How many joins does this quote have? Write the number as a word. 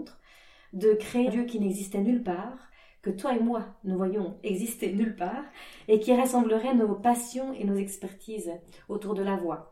one